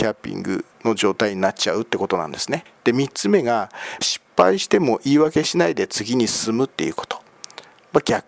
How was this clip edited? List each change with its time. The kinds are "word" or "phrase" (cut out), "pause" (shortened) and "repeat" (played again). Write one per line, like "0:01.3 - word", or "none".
0:04.0 - phrase